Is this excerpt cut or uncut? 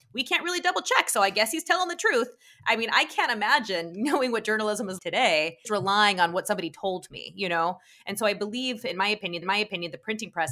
cut